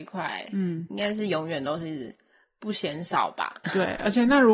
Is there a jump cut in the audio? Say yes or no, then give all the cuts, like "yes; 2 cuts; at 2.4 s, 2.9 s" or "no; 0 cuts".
no; 0 cuts